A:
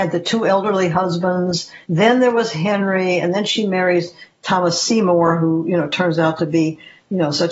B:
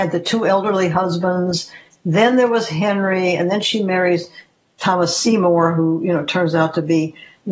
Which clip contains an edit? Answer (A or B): A